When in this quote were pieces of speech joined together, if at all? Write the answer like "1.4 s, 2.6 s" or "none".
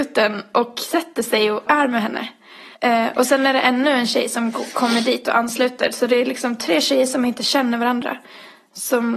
1.7 s, 2.7 s